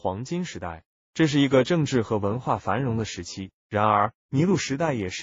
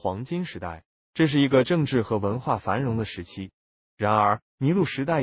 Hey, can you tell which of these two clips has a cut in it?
first; 1 cut; at 3.6 s

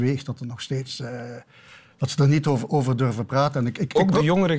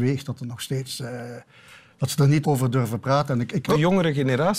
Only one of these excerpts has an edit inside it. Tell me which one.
second; 2 cuts; at 2.4 s, 3.7 s

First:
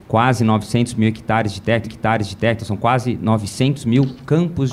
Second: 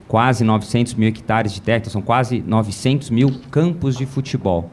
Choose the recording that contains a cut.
first; 1 cut; at 1.8 s

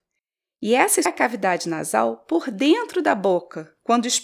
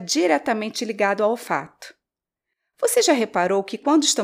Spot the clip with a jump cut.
first; 1 cut; at 1.1 s

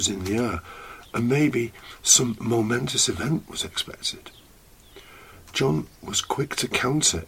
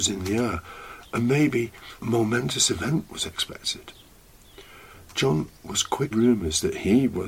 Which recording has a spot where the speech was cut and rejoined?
second; 2 cuts; at 2.0 s, 6.1 s

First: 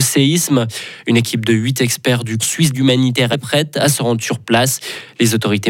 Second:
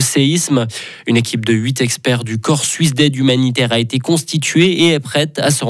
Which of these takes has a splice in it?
first; 3 cuts; at 2.4 s, 2.7 s, 3.3 s

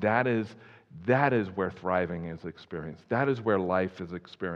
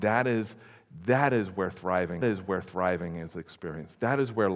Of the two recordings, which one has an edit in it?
second; 1 cut; at 2.2 s

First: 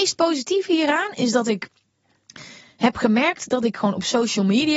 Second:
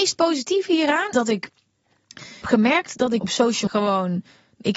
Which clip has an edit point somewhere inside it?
second; 4 cuts; at 1.1 s, 2.4 s, 3.2 s, 3.7 s

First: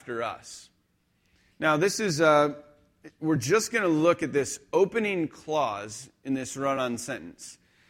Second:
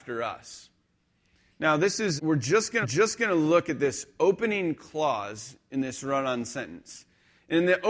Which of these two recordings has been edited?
second; 2 cuts; at 2.2 s, 2.8 s

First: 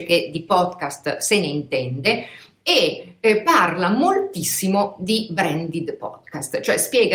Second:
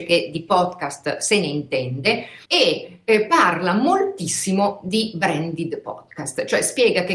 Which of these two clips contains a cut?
second; 1 cut; at 2.4 s

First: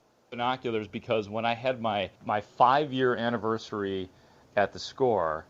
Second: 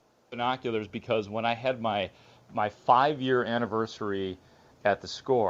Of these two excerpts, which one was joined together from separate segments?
first; 1 cut; at 2.2 s

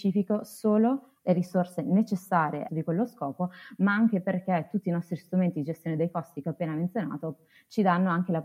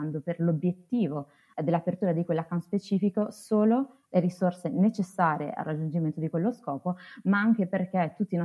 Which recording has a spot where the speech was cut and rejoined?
first; 1 cut; at 2.7 s

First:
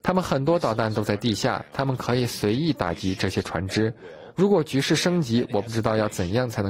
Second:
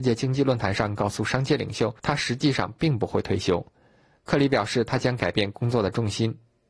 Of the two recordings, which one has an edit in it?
second; 1 cut; at 2.0 s

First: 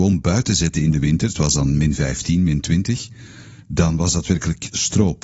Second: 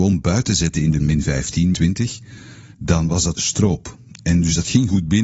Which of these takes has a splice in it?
second; 3 cuts; at 1.0 s, 1.7 s, 3.3 s

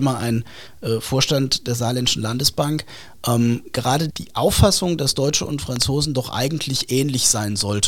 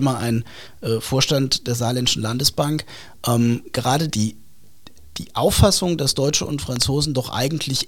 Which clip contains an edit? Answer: first; 1 cut; at 4.1 s

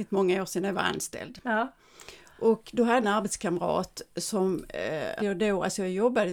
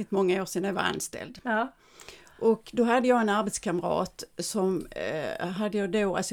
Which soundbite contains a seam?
first; 2 cuts; at 3.0 s, 5.2 s

